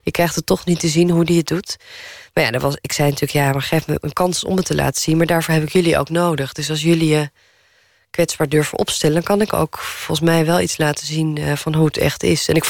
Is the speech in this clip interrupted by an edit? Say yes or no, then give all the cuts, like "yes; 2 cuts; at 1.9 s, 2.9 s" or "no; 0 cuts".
no; 0 cuts